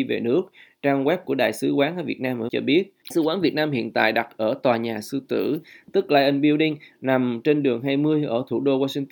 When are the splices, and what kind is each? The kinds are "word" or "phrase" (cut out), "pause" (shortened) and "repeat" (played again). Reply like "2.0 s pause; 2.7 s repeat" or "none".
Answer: 2.5 s word; 3.1 s word